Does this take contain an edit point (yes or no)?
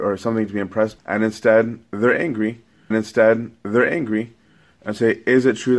yes